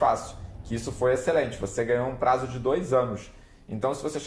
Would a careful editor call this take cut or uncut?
uncut